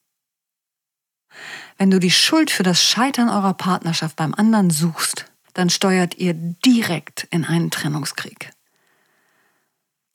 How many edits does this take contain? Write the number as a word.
one